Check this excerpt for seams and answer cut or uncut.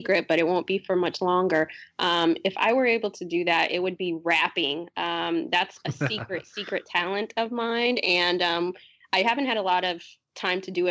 uncut